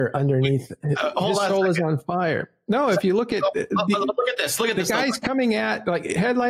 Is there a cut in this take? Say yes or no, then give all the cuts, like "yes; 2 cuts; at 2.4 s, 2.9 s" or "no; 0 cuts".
no; 0 cuts